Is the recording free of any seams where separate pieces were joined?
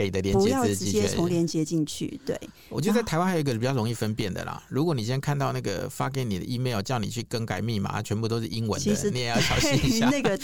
yes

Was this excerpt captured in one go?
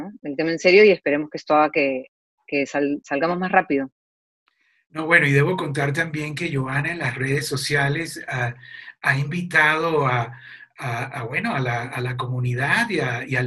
yes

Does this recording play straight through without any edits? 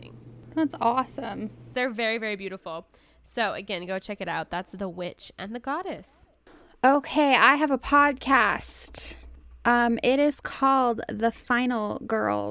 yes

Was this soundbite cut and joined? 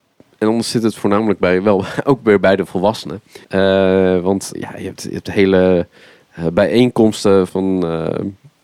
yes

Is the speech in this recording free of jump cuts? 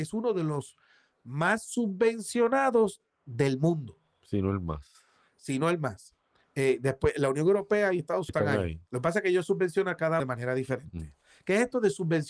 no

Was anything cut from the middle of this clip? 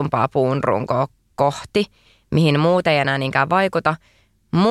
no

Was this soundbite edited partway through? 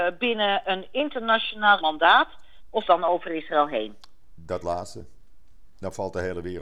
yes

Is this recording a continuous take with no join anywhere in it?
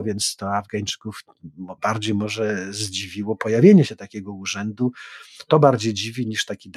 no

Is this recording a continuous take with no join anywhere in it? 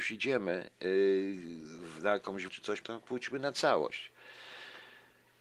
no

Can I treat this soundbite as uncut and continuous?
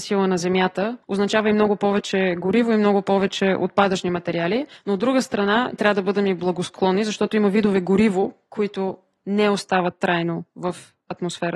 yes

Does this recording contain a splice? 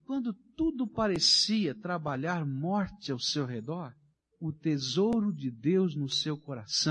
no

